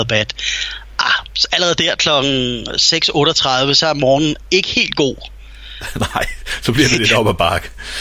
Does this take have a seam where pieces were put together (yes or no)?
no